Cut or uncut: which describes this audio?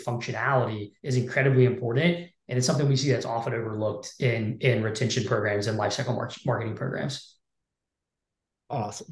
cut